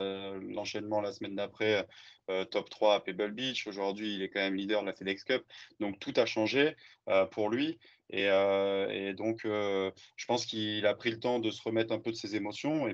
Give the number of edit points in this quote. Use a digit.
0